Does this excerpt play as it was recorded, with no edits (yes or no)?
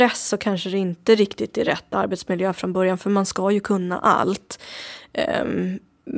yes